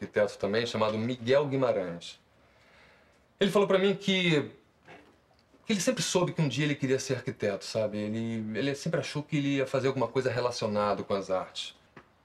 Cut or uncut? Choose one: uncut